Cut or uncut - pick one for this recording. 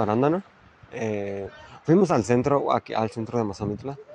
uncut